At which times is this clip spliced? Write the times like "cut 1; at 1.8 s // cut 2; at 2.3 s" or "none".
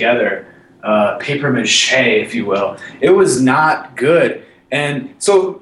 none